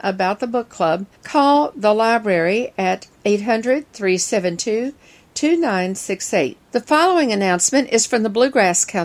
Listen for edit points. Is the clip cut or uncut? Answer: cut